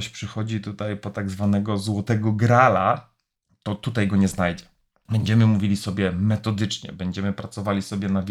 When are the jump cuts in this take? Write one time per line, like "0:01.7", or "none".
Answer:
none